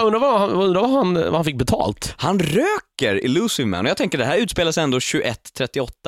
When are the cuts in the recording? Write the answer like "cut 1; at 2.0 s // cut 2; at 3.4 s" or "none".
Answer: none